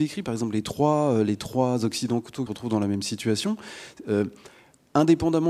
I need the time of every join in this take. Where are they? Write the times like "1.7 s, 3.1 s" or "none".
2.5 s